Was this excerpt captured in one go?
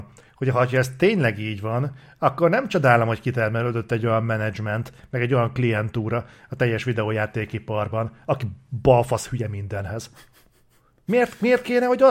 yes; 0 cuts

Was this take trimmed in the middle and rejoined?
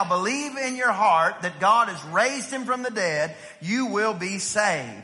no; 0 cuts

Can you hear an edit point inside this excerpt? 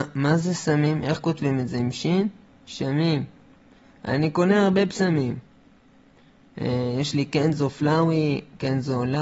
no; 0 cuts

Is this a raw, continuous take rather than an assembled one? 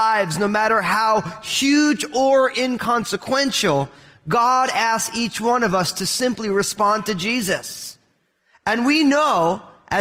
yes; 0 cuts

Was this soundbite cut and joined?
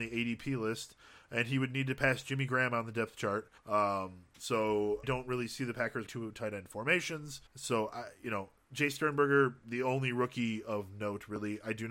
yes; 4 cuts; at 3.6 s, 5.0 s, 6.1 s, 7.5 s

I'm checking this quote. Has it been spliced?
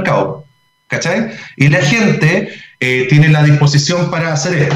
no; 0 cuts

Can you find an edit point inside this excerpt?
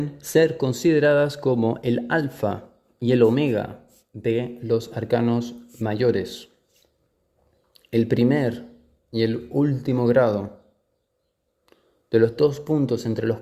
no; 0 cuts

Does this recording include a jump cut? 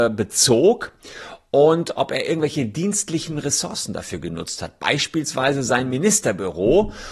no; 0 cuts

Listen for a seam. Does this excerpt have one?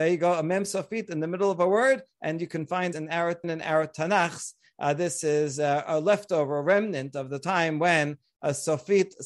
yes; 2 cuts; at 2.9 s, 3.4 s

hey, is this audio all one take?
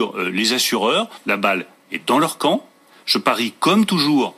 yes; 0 cuts

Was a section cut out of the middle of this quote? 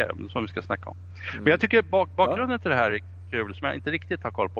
no; 0 cuts

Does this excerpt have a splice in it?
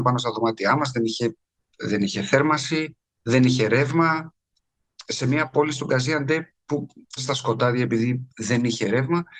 yes; 2 cuts; at 1.7 s, 7.2 s

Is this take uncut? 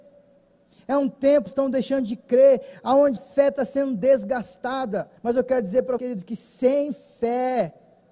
no; 4 cuts; at 1.5 s, 3.2 s, 5.2 s, 6.0 s

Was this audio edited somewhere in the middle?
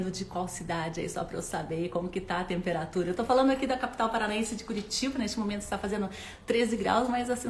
no; 0 cuts

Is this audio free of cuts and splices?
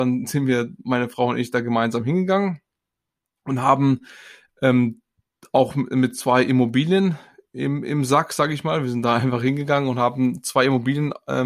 yes; 0 cuts

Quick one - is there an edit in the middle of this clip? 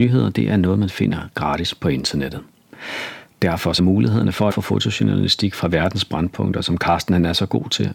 yes; 2 cuts; at 3.8 s, 4.5 s

